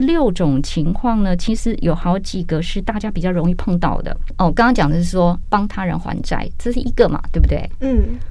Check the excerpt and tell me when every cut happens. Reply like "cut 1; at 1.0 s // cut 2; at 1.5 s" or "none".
cut 1; at 5.4 s